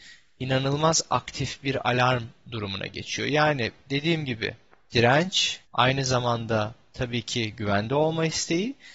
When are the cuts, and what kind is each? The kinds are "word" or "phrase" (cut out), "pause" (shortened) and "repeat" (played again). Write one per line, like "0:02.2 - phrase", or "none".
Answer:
0:05.7 - pause

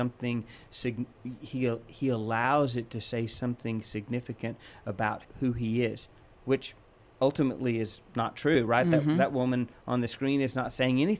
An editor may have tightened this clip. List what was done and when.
0:05.2 - word

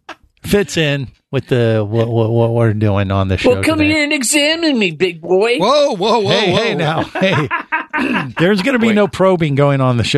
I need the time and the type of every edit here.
none

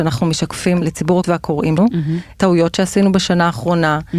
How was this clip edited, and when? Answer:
0:01.2 - word
0:01.8 - word

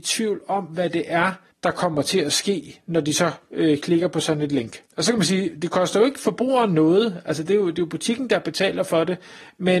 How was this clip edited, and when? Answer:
0:01.5 - pause
0:04.9 - pause

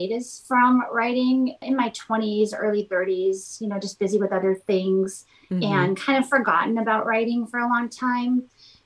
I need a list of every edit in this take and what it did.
none

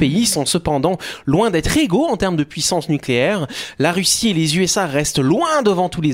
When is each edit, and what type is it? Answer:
none

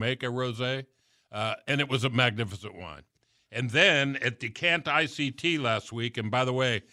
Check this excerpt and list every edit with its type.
none

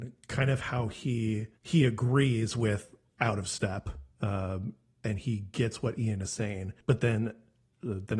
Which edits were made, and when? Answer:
0:01.6 - pause
0:04.1 - pause
0:06.8 - pause

